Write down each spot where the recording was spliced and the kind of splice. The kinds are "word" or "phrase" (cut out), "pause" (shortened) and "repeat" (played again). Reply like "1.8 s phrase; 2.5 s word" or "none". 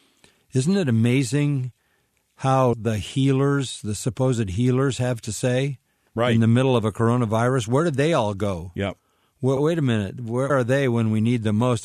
2.7 s word; 9.6 s word; 10.5 s word